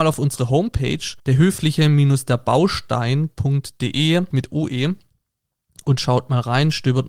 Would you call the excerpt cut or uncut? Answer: cut